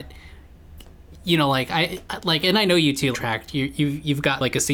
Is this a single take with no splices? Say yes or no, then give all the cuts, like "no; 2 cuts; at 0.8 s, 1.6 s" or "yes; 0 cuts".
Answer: no; 1 cut; at 3.1 s